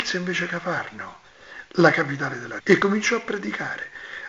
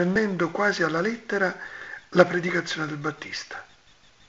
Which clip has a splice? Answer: first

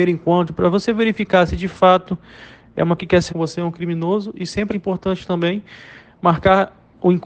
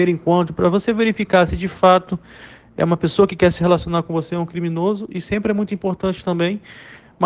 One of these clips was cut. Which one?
first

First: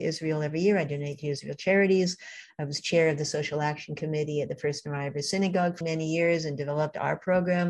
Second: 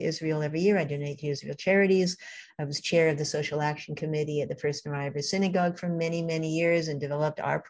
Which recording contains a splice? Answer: first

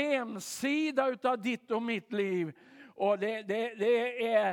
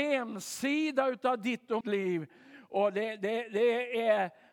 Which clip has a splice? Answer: second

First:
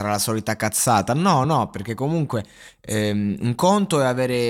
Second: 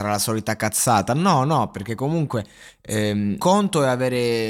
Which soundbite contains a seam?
second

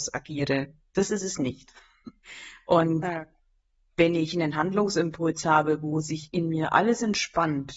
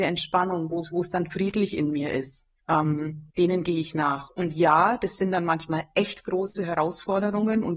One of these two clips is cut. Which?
second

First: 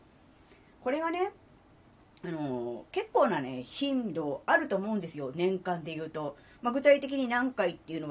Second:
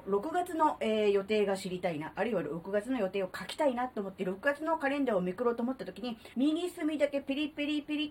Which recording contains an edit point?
second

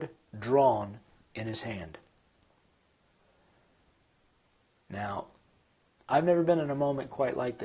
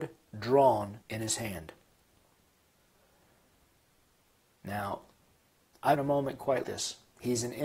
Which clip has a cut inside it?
second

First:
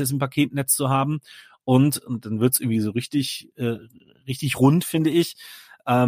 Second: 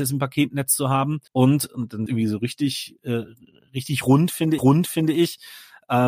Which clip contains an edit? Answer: second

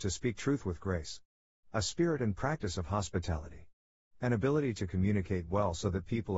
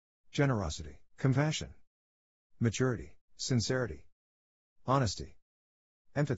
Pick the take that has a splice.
second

